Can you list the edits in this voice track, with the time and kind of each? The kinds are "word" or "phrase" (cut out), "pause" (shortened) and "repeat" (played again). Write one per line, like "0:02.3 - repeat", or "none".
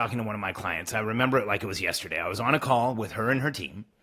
none